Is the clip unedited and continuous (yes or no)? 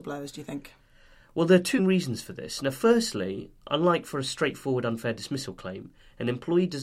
no